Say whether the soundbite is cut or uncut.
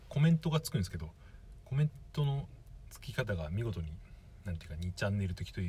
cut